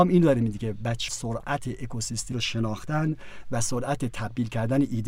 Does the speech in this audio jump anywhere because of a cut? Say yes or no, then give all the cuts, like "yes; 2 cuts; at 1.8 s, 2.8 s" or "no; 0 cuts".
yes; 2 cuts; at 1.1 s, 2.3 s